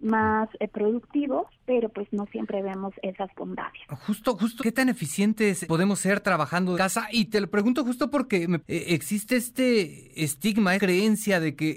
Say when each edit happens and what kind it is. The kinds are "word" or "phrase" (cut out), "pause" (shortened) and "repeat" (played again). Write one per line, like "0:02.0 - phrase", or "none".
0:01.5 - pause
0:04.6 - phrase
0:05.6 - word
0:06.7 - word
0:08.6 - phrase
0:10.8 - word